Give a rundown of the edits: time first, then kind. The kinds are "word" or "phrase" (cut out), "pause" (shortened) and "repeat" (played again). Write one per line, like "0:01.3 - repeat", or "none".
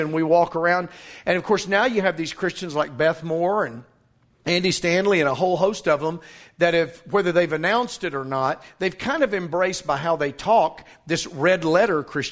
none

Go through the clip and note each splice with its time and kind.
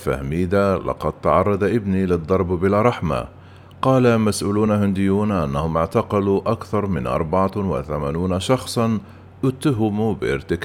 none

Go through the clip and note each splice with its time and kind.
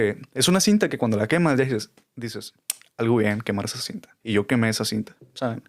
0:04.2 - pause

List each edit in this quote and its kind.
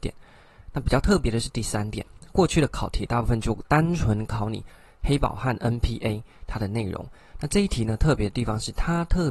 none

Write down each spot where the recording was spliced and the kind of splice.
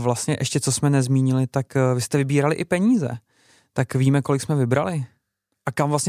none

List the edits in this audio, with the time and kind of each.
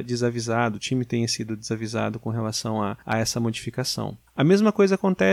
0:03.0 - pause
0:04.3 - pause

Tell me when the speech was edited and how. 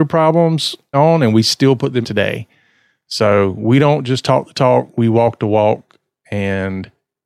0:00.9 - word
0:02.0 - phrase

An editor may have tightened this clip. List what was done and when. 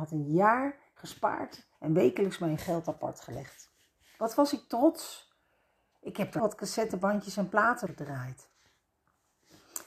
0:01.7 - pause
0:02.6 - word
0:06.4 - word
0:07.9 - word

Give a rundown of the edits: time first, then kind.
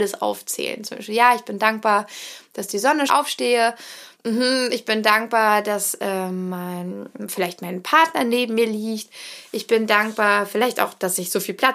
0:03.1 - phrase
0:04.1 - pause

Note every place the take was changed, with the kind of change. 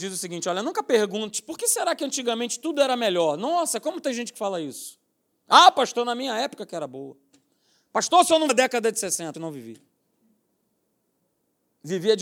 0:08.5 - word
0:09.3 - word

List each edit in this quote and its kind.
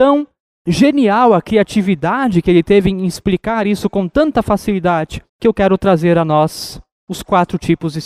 0:05.3 - pause

